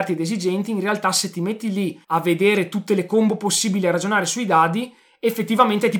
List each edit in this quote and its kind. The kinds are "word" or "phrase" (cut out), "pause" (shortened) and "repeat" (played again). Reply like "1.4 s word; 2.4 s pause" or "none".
2.0 s pause